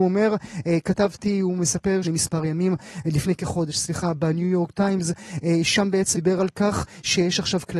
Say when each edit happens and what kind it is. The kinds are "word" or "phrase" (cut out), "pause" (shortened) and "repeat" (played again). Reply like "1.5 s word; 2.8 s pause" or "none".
2.0 s phrase; 6.1 s word